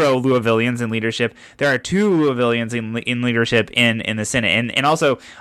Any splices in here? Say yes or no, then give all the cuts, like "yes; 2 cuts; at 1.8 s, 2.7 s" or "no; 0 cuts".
no; 0 cuts